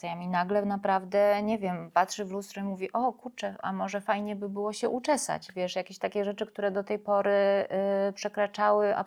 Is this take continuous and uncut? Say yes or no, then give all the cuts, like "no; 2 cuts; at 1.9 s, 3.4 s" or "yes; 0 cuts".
yes; 0 cuts